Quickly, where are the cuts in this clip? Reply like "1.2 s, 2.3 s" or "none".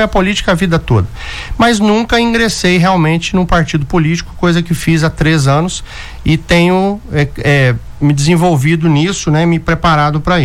none